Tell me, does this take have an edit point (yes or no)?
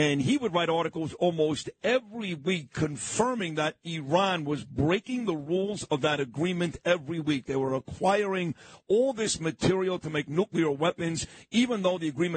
no